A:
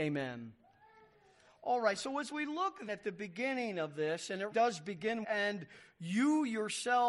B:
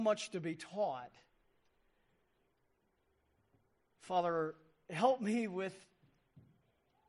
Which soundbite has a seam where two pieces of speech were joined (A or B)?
A